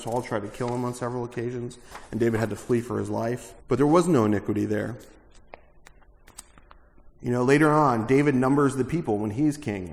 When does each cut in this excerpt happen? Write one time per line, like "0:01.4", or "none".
0:03.6
0:07.1